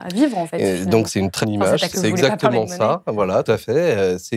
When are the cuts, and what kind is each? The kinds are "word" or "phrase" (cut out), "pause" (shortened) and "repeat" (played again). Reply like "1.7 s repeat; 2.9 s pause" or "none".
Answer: 1.1 s word; 1.4 s word; 1.9 s word; 3.4 s word